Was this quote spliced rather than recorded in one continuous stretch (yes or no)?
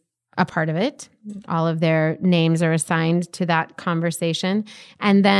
no